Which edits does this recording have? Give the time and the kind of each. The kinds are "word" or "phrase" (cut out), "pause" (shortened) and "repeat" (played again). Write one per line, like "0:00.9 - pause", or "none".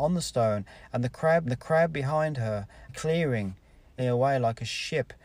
0:01.4 - repeat
0:02.9 - word
0:04.0 - phrase